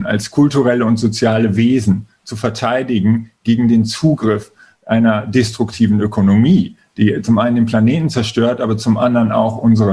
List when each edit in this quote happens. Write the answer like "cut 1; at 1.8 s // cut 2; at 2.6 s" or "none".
none